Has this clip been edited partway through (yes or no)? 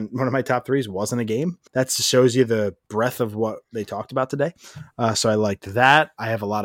yes